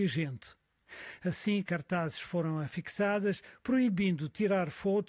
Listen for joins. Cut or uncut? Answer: uncut